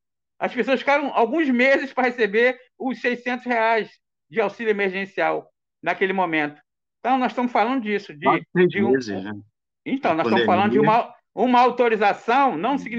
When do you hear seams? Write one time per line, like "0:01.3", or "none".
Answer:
none